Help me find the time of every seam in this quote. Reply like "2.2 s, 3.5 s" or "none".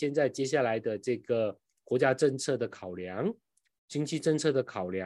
none